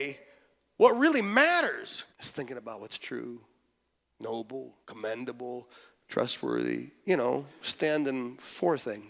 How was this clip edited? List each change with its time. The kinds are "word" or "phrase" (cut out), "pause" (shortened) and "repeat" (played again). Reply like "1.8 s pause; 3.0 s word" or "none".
2.1 s pause; 4.8 s pause